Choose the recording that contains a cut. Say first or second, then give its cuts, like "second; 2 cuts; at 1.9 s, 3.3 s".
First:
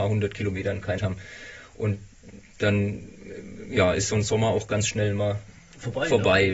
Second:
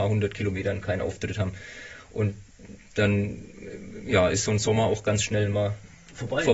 first; 1 cut; at 1.0 s